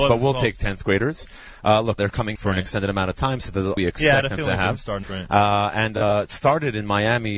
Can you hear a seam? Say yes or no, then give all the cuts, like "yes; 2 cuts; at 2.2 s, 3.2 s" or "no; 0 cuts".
yes; 4 cuts; at 2.0 s, 2.3 s, 3.8 s, 5.0 s